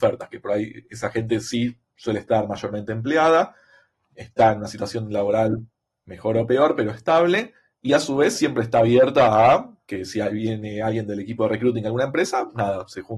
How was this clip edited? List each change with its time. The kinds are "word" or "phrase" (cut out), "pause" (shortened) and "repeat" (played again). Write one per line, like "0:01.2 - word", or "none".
none